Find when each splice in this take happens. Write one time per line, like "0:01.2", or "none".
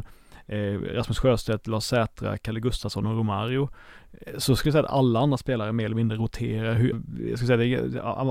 0:06.9